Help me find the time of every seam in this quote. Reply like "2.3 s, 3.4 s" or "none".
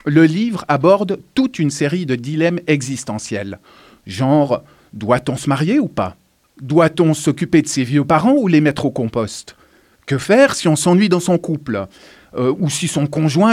none